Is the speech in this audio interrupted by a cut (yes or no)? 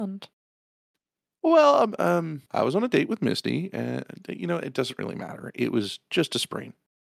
yes